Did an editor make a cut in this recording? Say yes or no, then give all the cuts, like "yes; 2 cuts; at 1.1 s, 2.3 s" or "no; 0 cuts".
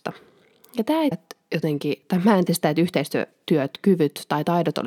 yes; 2 cuts; at 1.1 s, 2.5 s